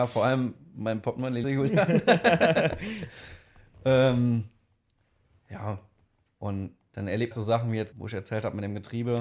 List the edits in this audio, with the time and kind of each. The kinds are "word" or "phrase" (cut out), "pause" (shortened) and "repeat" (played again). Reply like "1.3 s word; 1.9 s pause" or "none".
1.4 s phrase; 7.3 s phrase; 7.9 s phrase